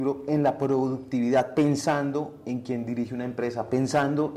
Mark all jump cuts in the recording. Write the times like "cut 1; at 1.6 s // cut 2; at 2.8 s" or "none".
none

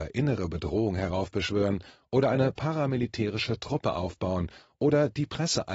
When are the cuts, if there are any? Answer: none

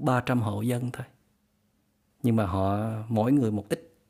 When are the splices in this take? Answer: none

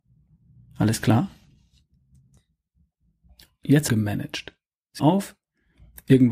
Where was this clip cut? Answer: cut 1; at 3.9 s // cut 2; at 5.0 s

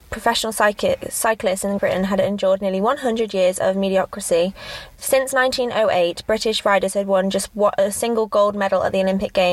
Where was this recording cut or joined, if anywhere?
cut 1; at 1.8 s

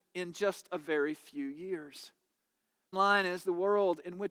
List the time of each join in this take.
cut 1; at 2.9 s

